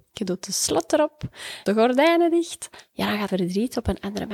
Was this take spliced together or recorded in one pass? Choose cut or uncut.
cut